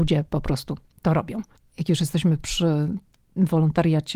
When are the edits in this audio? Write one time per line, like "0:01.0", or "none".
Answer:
none